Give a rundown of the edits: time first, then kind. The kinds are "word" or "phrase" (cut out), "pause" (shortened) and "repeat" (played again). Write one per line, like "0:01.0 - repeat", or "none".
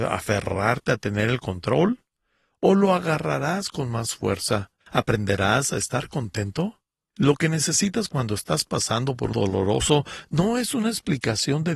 0:04.8 - pause
0:09.3 - word